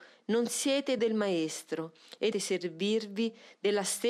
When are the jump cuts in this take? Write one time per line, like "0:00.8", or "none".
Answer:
0:01.0
0:02.3